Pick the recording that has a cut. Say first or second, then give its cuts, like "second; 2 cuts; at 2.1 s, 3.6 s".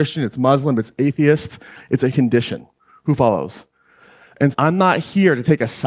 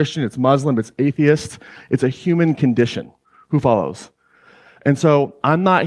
first; 2 cuts; at 2.1 s, 4.5 s